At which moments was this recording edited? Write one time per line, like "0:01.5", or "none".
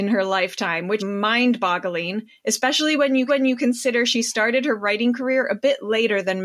0:01.0
0:03.3